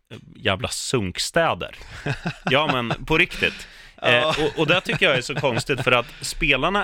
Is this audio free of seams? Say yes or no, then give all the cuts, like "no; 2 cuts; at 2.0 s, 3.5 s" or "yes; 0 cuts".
yes; 0 cuts